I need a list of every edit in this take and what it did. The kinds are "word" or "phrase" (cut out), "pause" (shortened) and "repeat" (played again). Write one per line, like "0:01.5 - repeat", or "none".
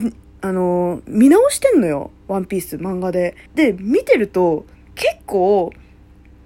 0:03.5 - pause